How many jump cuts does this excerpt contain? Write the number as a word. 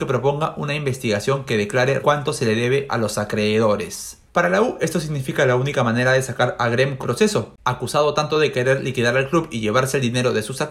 three